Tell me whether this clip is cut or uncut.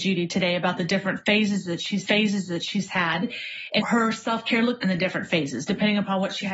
cut